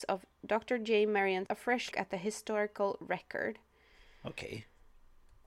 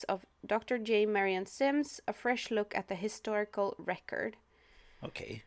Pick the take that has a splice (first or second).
first